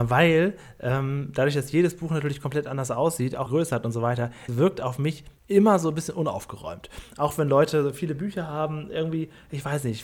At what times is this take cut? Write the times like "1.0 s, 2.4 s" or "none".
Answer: 3.5 s, 4.5 s, 5.4 s